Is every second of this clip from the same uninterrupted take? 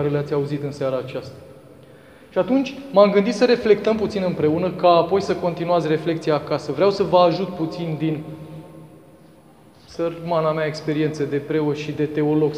yes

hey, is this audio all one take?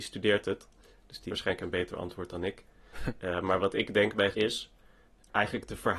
no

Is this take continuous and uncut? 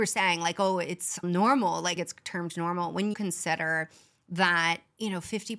no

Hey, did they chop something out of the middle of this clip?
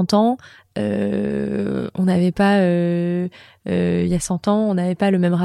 no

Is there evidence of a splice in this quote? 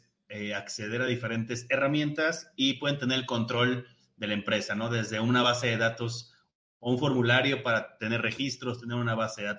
no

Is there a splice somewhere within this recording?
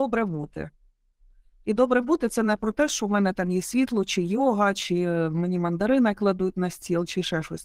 no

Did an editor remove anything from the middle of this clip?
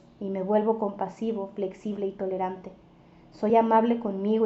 no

